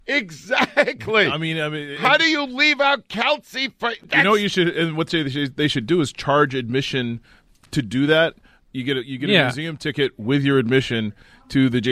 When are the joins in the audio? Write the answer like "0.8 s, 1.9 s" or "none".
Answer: none